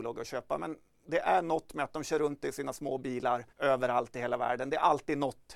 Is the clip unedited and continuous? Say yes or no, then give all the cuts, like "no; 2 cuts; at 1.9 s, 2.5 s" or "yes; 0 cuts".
no; 1 cut; at 3.5 s